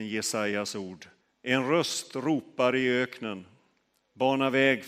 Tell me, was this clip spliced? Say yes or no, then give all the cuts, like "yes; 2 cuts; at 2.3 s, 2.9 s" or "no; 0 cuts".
yes; 1 cut; at 1.2 s